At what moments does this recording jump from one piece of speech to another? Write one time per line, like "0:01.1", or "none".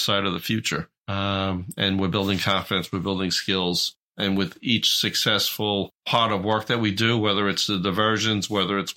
0:01.0